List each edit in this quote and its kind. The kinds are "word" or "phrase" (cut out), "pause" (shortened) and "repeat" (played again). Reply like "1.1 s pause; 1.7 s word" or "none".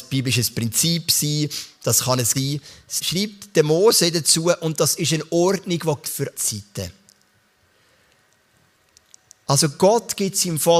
2.3 s word; 3.0 s word; 6.0 s word; 6.3 s word